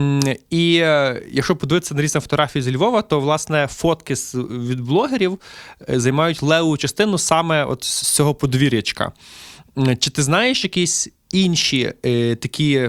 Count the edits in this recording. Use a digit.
0